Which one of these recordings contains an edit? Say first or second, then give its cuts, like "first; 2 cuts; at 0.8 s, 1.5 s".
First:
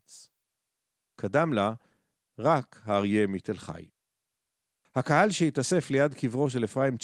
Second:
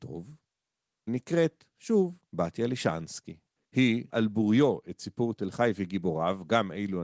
second; 3 cuts; at 1.1 s, 2.3 s, 4.1 s